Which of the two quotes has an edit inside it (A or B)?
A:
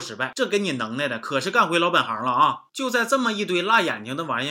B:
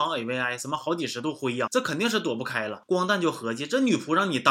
B